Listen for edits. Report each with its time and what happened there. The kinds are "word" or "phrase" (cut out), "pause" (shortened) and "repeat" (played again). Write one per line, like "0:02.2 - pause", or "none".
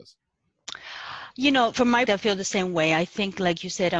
0:01.7 - word
0:02.1 - word

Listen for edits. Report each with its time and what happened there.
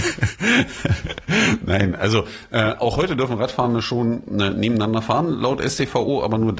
none

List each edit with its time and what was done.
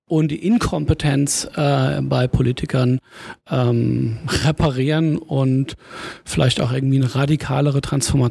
none

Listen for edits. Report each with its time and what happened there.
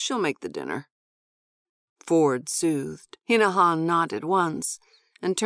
0:03.2 - pause

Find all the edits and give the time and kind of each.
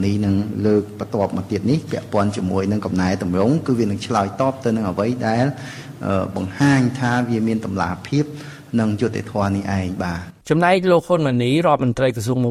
0:10.4 - pause

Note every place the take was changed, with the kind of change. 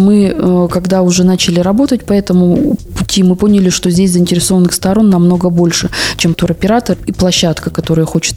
0:06.3 - word

